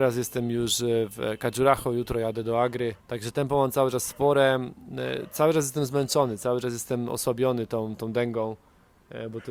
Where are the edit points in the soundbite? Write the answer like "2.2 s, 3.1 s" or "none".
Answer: 3.0 s